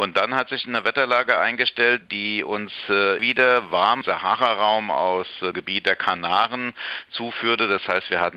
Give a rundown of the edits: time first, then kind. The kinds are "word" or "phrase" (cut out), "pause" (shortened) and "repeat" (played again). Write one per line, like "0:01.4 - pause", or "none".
0:03.2 - word
0:04.0 - phrase
0:05.5 - word